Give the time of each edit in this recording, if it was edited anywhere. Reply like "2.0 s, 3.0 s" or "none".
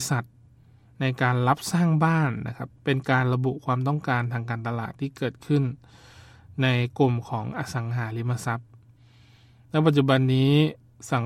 2.8 s